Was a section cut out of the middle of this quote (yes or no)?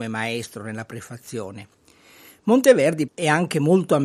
yes